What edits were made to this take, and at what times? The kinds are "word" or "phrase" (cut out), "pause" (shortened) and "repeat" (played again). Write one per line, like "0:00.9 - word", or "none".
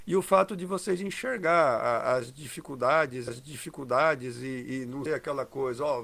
0:03.3 - repeat
0:05.1 - word